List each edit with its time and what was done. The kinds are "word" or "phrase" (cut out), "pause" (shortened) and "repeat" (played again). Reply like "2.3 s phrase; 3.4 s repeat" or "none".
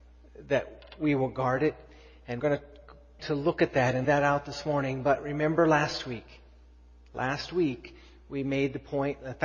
2.4 s word; 3.2 s word; 4.0 s word

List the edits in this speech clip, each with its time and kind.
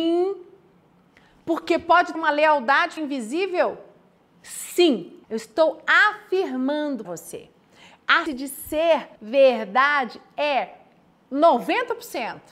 2.1 s word; 3.0 s word; 5.2 s pause; 7.0 s word; 8.3 s word; 9.1 s pause

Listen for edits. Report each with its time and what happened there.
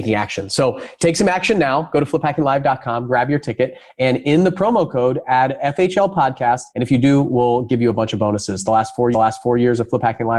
6.7 s pause; 9.1 s repeat

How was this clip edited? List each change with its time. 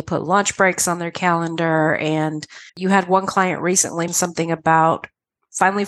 2.7 s pause; 4.1 s word

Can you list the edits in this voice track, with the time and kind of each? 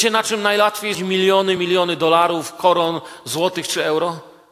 0.9 s word; 1.6 s word

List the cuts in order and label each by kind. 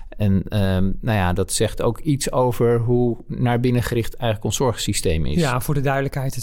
none

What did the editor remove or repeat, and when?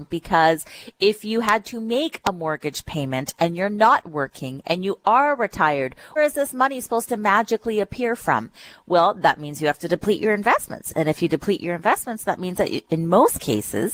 6.2 s word

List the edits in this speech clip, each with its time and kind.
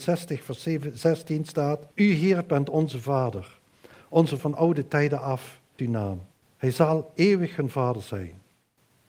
1.9 s pause; 4.4 s word; 5.8 s word; 6.3 s pause

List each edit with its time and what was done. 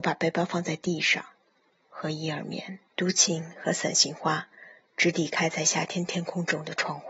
2.9 s pause

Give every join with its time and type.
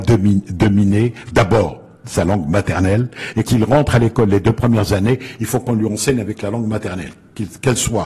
3.4 s word

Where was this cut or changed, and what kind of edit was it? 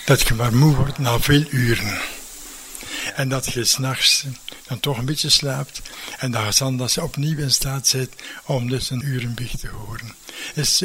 9.0 s word

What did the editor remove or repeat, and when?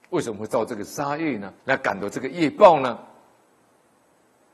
1.6 s pause

